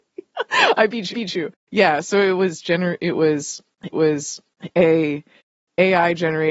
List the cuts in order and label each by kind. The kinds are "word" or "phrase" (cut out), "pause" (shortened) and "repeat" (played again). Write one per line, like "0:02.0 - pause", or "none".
0:01.1 - repeat
0:03.9 - repeat